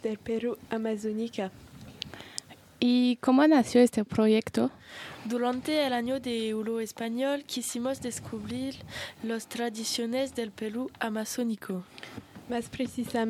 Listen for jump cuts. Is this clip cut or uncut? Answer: uncut